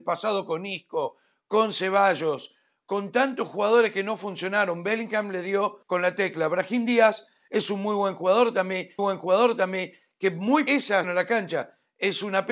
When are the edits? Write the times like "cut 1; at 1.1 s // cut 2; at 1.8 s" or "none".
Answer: cut 1; at 5.8 s // cut 2; at 9.0 s // cut 3; at 10.7 s // cut 4; at 11.0 s